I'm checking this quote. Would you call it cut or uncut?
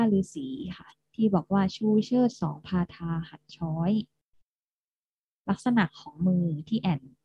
uncut